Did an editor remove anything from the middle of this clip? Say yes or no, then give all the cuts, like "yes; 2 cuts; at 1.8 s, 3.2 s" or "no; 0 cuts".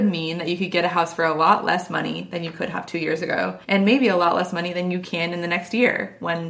yes; 1 cut; at 3.6 s